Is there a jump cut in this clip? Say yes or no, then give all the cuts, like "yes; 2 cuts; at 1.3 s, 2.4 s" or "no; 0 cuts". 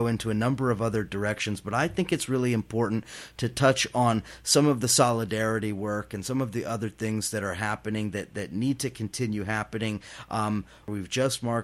no; 0 cuts